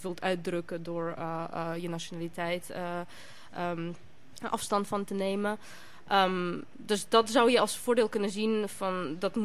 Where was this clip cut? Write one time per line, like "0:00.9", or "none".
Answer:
none